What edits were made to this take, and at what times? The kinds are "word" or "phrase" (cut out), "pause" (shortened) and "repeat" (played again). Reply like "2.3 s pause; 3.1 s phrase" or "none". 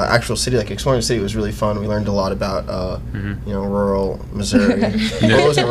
none